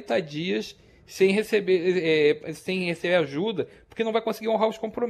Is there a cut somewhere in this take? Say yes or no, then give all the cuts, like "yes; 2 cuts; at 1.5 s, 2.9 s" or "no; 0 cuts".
no; 0 cuts